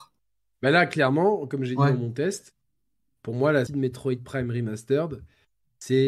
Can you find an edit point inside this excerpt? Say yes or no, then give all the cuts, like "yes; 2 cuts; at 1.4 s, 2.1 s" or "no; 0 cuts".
yes; 1 cut; at 3.7 s